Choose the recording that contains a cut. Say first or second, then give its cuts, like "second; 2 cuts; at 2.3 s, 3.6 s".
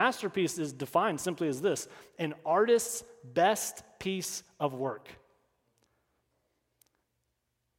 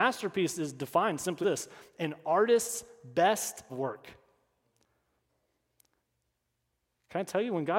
second; 2 cuts; at 1.4 s, 3.7 s